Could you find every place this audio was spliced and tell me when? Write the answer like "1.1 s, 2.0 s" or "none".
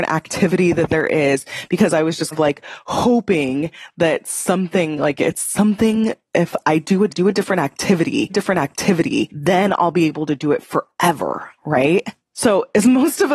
2.3 s, 7.1 s, 8.3 s, 11.6 s

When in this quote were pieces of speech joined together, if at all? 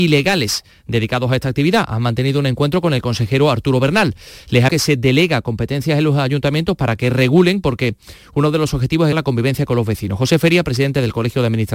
4.7 s, 9.1 s

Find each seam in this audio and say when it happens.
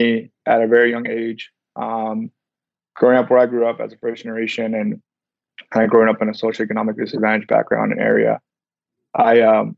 none

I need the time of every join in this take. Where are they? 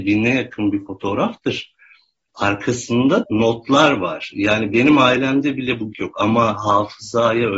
3.2 s, 5.9 s

